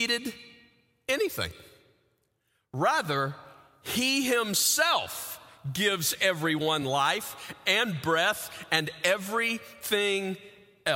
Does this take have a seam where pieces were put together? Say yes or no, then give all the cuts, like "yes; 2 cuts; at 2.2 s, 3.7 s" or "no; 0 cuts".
no; 0 cuts